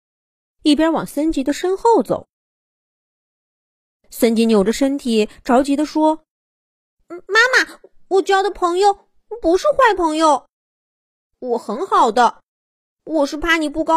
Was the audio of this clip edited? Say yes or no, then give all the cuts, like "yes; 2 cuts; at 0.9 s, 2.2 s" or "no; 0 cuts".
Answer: no; 0 cuts